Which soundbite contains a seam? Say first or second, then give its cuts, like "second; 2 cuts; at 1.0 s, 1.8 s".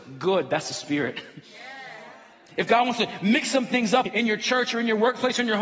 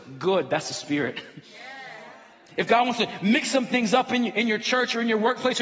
first; 1 cut; at 4.1 s